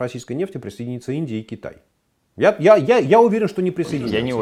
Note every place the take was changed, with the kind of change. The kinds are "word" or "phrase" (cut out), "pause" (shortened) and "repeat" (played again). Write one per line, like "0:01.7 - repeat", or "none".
0:01.9 - pause